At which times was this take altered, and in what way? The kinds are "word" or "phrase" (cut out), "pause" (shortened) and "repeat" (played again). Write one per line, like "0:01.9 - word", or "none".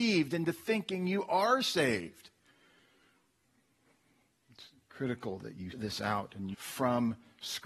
0:05.7 - word
0:06.5 - word